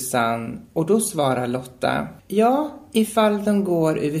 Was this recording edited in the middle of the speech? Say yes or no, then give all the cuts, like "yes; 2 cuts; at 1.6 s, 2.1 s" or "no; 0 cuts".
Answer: yes; 1 cut; at 2.2 s